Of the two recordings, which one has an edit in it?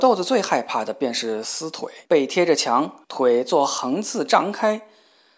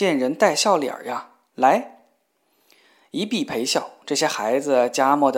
first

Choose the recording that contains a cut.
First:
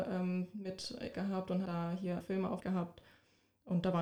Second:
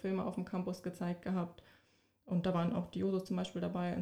first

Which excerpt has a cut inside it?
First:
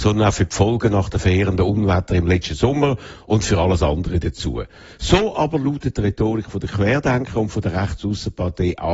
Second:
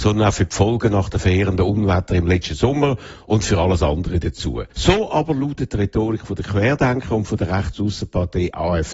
second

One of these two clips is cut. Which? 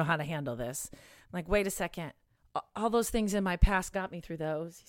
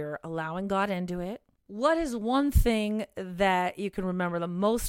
first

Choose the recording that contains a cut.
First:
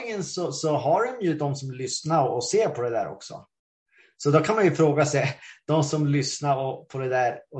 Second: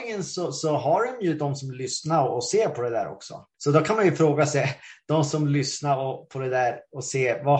second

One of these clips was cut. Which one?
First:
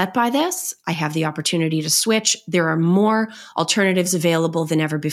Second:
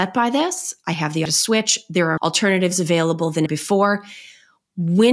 second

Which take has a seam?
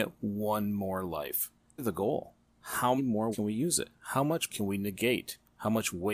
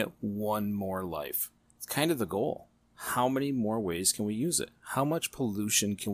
first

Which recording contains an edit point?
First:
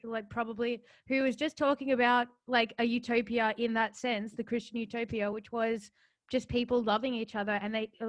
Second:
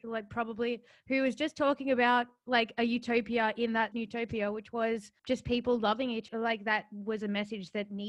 second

